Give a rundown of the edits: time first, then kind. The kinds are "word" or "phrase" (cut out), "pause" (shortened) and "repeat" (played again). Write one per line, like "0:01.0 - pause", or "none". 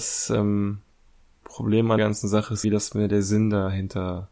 0:02.0 - word
0:02.6 - word